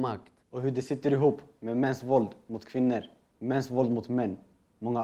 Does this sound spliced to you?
no; 0 cuts

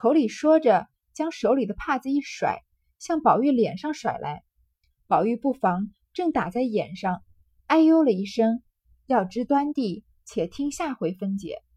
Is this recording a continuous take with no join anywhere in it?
yes; 0 cuts

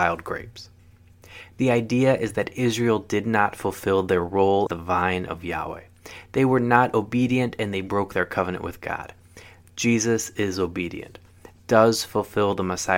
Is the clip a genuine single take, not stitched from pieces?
no; 1 cut; at 4.7 s

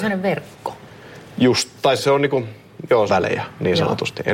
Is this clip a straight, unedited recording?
no; 2 cuts; at 2.0 s, 3.1 s

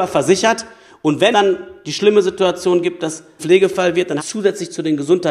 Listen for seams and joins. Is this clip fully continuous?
no; 3 cuts; at 1.3 s, 3.4 s, 4.2 s

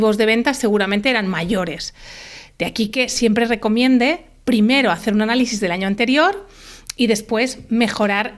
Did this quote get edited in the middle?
no; 0 cuts

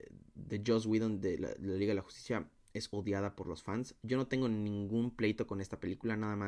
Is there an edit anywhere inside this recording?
no; 0 cuts

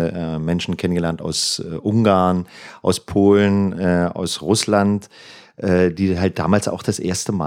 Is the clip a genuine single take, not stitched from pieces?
yes; 0 cuts

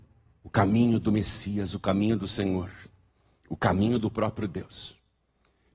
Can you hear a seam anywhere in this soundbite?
no; 0 cuts

